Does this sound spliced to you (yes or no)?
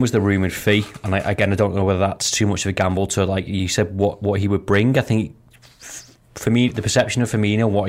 no